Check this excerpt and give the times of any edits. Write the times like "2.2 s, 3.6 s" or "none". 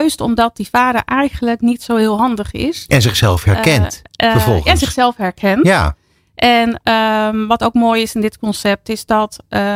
none